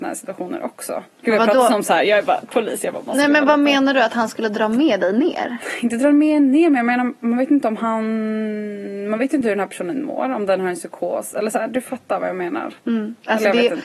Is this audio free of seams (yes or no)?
no